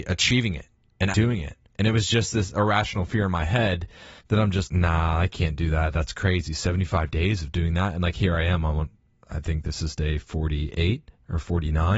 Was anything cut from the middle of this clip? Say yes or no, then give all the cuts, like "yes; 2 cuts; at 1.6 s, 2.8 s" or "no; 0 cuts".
yes; 4 cuts; at 1.1 s, 1.6 s, 4.2 s, 4.6 s